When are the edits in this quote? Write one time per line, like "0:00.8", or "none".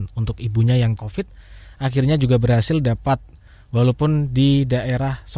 0:01.0